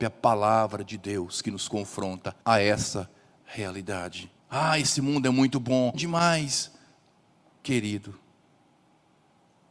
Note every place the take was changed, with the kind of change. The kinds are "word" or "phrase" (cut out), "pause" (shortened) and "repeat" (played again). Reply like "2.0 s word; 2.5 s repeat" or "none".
2.4 s pause; 4.4 s pause; 5.9 s phrase